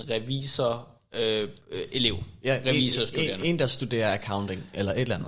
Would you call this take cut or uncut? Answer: cut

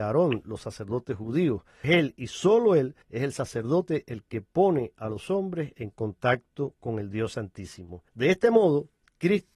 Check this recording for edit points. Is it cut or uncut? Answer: cut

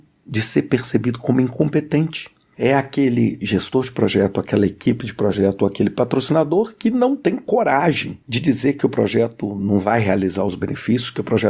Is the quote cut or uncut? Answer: uncut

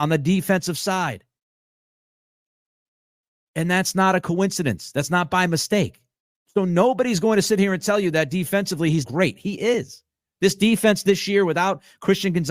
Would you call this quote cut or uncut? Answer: cut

